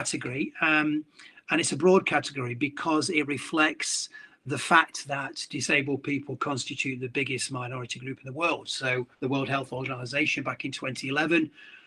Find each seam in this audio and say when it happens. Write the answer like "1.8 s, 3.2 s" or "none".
9.1 s